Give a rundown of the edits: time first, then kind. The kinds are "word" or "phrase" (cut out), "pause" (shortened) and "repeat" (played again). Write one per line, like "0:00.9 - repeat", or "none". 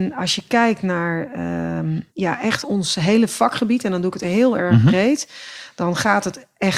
0:02.1 - pause
0:02.6 - word
0:04.2 - word